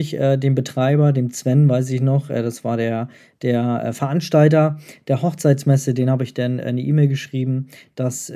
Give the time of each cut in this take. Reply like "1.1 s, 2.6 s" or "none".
none